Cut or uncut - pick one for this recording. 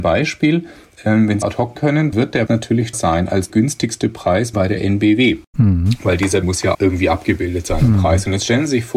cut